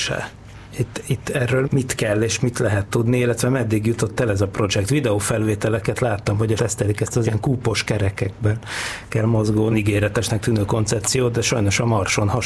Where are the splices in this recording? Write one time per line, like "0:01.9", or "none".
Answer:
0:01.6
0:06.6
0:07.2
0:09.7